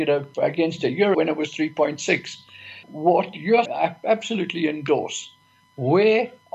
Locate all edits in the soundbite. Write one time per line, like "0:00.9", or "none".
0:01.1
0:02.8
0:03.7